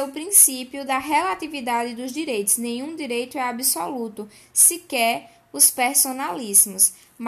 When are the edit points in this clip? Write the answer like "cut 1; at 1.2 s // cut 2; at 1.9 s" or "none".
none